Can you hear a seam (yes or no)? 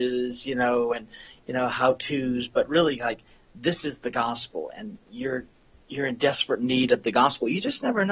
no